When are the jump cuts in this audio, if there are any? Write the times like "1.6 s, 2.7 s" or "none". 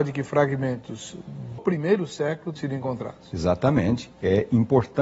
1.6 s, 2.6 s, 4.1 s